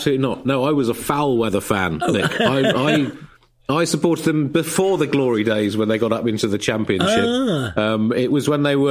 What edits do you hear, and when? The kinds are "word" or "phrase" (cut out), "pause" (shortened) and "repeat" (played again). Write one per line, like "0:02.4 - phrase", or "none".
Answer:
none